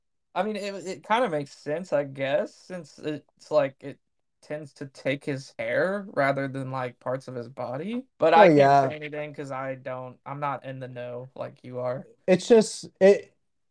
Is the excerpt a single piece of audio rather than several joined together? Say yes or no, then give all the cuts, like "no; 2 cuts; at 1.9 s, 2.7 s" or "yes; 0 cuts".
no; 1 cut; at 8.1 s